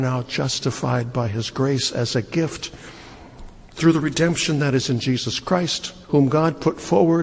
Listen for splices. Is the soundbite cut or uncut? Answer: cut